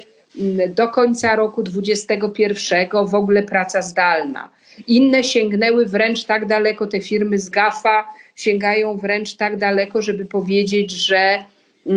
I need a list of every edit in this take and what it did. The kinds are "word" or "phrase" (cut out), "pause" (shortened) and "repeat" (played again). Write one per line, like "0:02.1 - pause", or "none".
0:07.5 - word